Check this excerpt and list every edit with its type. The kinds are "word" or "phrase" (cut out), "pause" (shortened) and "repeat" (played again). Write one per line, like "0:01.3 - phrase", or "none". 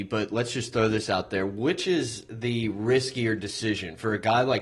none

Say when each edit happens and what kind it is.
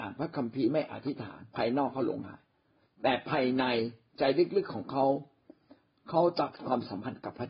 0:01.5 - pause

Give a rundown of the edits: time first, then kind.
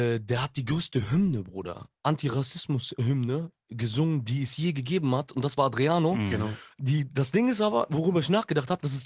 none

